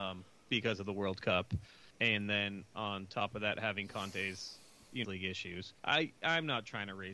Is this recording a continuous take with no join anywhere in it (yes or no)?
no